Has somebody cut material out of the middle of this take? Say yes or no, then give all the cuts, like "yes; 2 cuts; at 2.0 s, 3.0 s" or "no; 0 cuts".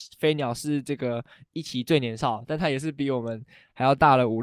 no; 0 cuts